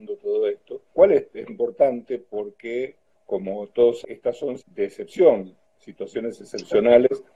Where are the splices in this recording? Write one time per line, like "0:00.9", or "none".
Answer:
0:00.9
0:01.5
0:03.1
0:04.0
0:04.6